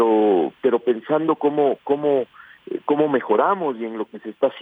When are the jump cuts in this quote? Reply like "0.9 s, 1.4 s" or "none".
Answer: none